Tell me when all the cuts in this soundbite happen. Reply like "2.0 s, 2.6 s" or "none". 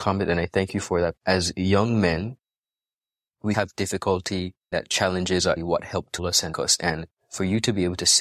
1.2 s, 3.5 s, 4.7 s, 5.6 s, 6.2 s, 6.5 s

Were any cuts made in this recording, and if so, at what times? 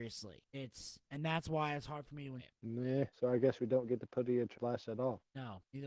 2.4 s, 4.5 s

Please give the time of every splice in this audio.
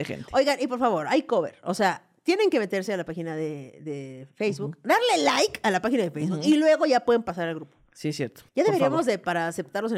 8.5 s

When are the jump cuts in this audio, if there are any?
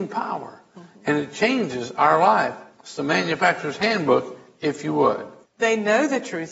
2.7 s, 5.4 s

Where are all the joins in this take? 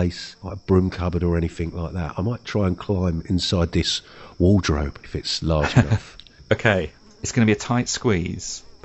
none

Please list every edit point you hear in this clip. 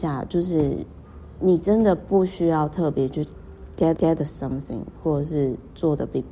4.0 s

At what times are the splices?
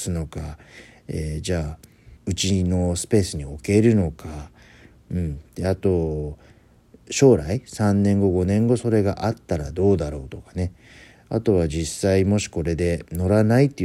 2.2 s

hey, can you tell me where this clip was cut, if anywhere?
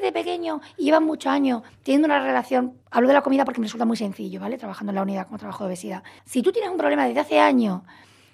2.8 s, 6.2 s

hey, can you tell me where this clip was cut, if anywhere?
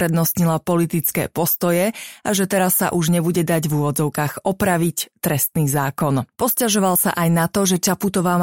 6.3 s

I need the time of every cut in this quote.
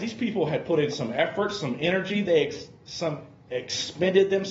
none

